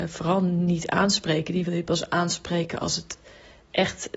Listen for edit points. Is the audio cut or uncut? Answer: uncut